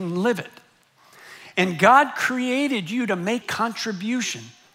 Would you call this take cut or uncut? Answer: cut